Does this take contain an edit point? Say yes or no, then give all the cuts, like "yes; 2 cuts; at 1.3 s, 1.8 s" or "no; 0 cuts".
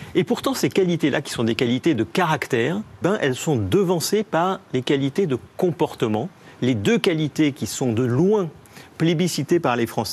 yes; 1 cut; at 3.0 s